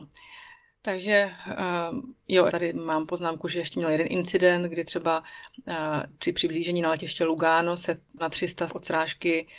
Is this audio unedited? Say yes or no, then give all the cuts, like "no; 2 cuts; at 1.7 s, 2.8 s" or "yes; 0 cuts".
no; 3 cuts; at 2.5 s, 8.2 s, 8.7 s